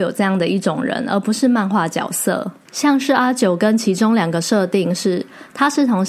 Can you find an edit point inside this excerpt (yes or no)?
yes